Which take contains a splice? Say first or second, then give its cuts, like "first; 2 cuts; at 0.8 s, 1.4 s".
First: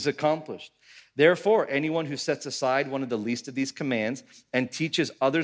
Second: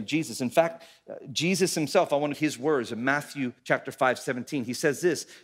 second; 2 cuts; at 2.3 s, 3.6 s